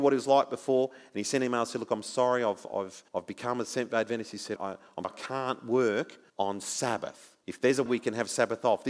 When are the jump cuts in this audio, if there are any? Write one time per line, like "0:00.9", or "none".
0:03.1
0:04.6
0:05.0
0:06.3
0:07.4
0:07.9